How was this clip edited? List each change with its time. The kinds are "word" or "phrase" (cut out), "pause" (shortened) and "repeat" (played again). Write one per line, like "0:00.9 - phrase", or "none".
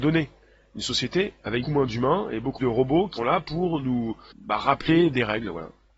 0:01.6 - word
0:02.6 - word
0:03.2 - word
0:04.3 - word